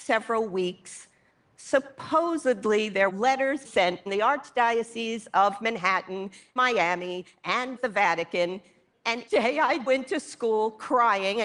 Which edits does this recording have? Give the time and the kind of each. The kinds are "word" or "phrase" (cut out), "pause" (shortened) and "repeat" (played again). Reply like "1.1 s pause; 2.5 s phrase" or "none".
3.1 s word; 3.6 s word; 4.1 s word; 6.6 s word; 7.8 s word; 9.3 s word; 9.9 s word